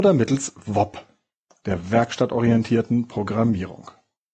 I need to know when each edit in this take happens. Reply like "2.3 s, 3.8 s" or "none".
none